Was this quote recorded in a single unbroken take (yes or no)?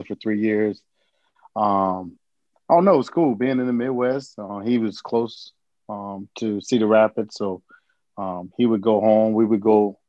yes